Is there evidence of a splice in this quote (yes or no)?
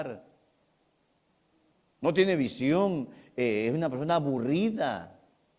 no